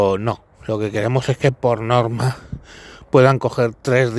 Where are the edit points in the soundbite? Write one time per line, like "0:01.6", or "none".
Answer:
none